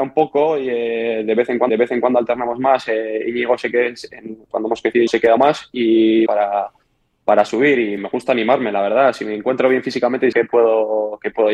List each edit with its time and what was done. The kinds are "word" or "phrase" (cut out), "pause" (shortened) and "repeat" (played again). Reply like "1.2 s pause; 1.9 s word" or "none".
1.7 s repeat; 5.1 s word; 5.4 s phrase; 6.3 s phrase; 8.0 s word; 10.3 s phrase